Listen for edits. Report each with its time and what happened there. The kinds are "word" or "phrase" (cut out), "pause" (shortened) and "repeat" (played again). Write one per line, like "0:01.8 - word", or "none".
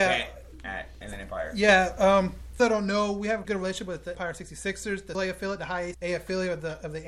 0:01.0 - word
0:02.6 - word
0:03.4 - word
0:04.1 - word
0:05.1 - word
0:05.9 - word